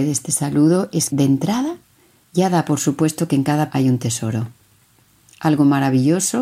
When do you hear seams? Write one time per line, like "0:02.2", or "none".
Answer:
0:01.1
0:03.7

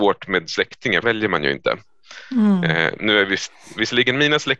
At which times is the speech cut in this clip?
0:01.0
0:03.0

